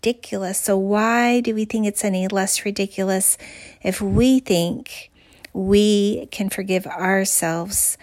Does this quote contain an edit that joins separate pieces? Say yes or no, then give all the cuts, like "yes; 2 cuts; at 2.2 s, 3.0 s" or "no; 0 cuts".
no; 0 cuts